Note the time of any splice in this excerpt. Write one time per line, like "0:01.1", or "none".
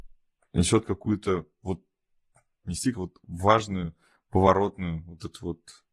0:02.6
0:02.9